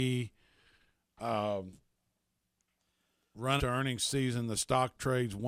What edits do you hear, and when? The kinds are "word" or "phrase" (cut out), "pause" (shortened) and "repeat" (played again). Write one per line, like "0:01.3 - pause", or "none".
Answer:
0:03.6 - word